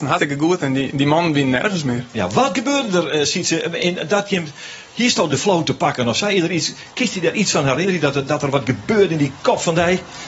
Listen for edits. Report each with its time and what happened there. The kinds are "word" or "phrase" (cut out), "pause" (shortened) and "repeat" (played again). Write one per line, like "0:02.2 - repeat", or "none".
none